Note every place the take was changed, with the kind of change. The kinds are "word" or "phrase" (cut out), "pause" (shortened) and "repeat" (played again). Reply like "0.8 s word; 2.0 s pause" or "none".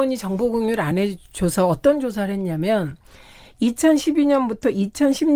none